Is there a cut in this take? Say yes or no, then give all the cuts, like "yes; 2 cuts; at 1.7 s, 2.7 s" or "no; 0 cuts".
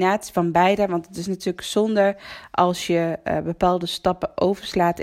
no; 0 cuts